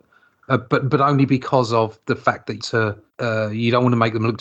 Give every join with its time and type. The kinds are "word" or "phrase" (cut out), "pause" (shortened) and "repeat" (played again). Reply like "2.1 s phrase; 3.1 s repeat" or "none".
2.6 s phrase; 3.1 s pause